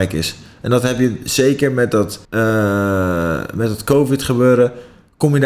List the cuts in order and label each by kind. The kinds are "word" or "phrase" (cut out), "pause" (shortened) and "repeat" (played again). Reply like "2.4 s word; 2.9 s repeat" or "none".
2.2 s pause